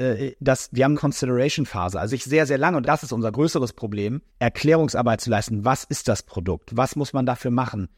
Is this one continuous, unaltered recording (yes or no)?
no